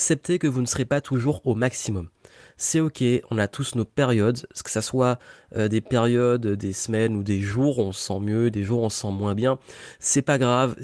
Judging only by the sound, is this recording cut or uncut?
uncut